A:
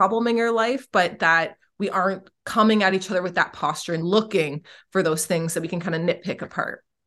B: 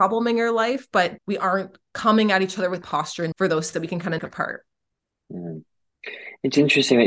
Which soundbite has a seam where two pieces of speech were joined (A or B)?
B